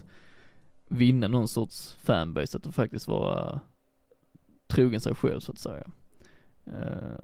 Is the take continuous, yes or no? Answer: yes